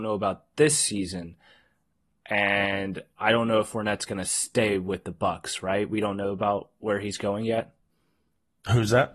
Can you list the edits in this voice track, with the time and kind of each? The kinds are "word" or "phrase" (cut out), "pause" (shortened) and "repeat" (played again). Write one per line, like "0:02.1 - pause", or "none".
none